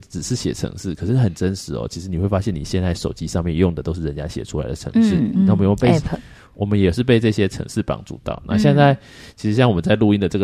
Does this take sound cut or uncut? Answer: uncut